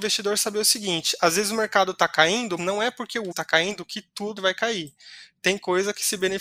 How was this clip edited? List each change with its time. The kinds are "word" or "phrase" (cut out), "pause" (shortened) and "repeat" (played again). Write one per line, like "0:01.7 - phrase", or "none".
0:02.6 - word
0:03.3 - word
0:04.4 - word